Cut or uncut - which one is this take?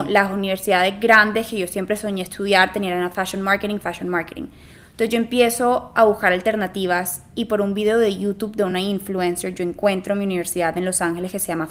uncut